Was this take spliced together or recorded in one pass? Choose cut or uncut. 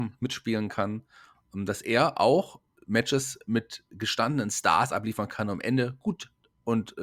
uncut